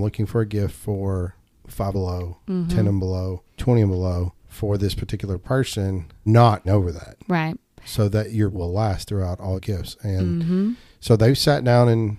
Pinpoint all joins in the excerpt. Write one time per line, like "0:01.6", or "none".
0:01.9
0:06.3
0:06.6
0:08.5
0:09.6